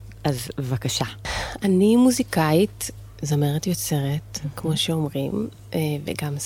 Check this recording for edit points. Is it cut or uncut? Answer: uncut